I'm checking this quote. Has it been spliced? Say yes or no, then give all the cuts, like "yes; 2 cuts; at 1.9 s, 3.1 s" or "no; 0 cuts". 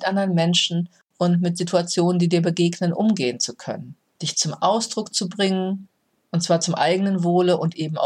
no; 0 cuts